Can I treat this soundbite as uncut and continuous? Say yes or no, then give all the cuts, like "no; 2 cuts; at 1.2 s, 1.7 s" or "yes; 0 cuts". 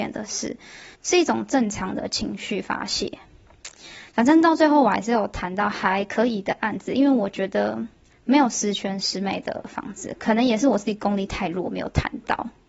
no; 2 cuts; at 0.9 s, 8.1 s